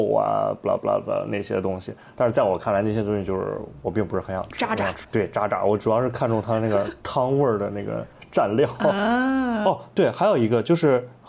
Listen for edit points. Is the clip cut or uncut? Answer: cut